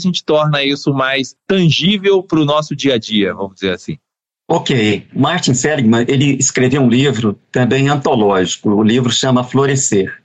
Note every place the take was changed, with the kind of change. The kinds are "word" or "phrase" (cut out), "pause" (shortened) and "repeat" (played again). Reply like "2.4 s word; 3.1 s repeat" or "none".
none